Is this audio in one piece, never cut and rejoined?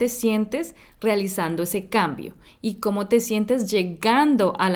yes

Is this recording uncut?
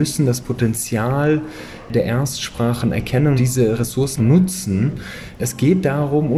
no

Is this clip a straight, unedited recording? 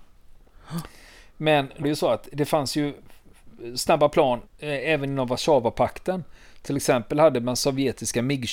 no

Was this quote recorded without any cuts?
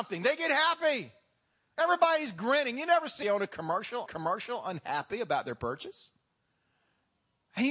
no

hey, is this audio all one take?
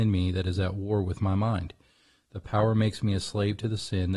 yes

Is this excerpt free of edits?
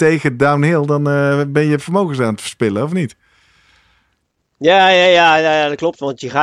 yes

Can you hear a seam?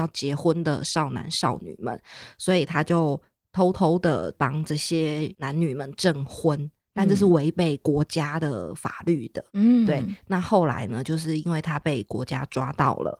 yes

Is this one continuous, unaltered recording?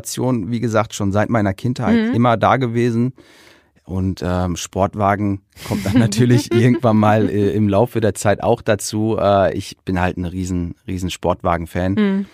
yes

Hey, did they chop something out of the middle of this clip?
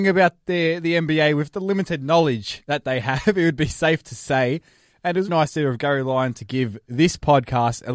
yes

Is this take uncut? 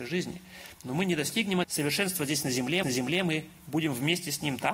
no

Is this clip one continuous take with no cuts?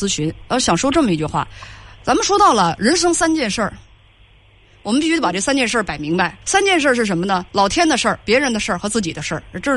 no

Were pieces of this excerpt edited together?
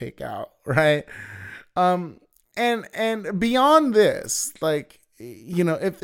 no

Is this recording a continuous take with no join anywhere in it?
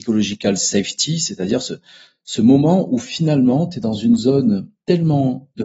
yes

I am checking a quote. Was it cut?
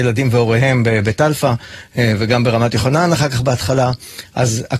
no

